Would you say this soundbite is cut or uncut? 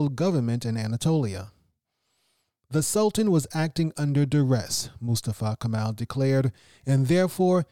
uncut